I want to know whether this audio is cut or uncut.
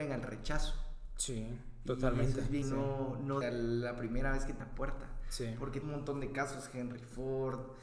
cut